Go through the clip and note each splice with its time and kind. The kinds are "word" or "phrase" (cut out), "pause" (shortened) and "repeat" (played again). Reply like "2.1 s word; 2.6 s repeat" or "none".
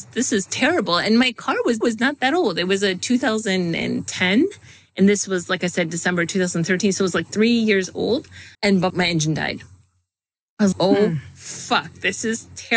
1.8 s repeat; 8.5 s pause; 8.9 s word; 10.7 s word